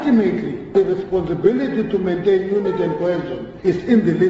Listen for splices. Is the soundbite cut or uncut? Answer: uncut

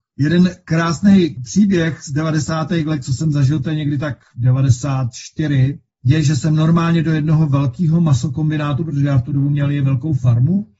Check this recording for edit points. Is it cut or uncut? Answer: uncut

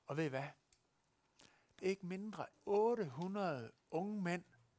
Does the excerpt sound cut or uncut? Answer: cut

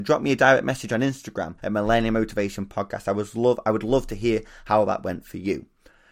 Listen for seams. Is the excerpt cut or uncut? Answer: cut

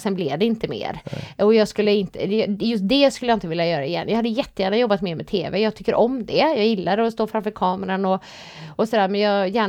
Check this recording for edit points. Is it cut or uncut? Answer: uncut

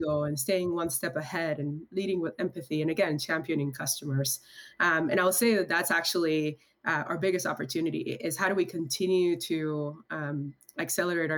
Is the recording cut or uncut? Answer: uncut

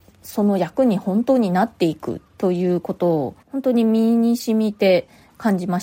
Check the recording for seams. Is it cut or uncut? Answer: cut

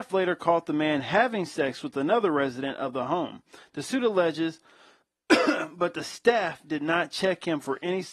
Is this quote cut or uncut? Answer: uncut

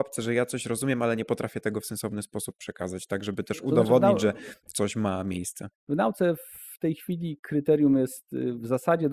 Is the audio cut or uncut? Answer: uncut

